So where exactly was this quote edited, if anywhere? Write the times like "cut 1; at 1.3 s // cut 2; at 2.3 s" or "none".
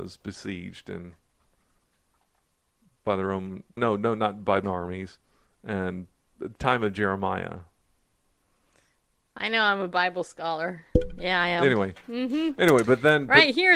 cut 1; at 3.8 s // cut 2; at 4.6 s